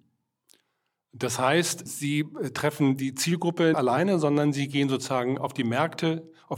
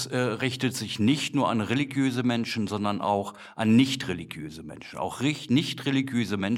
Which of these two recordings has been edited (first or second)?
first